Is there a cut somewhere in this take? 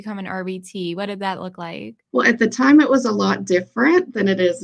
yes; 1 cut; at 2.1 s

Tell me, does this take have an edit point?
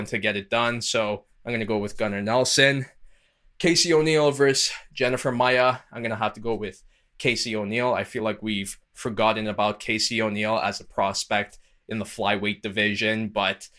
no; 0 cuts

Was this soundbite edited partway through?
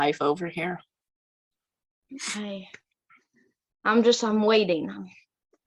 no; 0 cuts

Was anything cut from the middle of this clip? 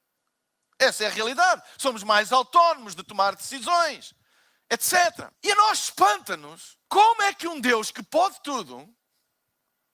yes; 2 cuts; at 5.3 s, 6.8 s

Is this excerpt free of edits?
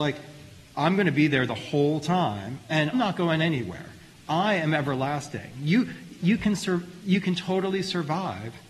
no; 3 cuts; at 2.9 s, 6.2 s, 7.0 s

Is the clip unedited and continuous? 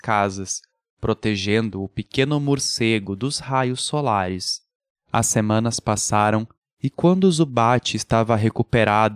yes; 0 cuts

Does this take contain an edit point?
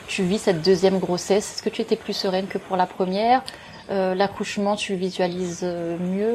no; 0 cuts

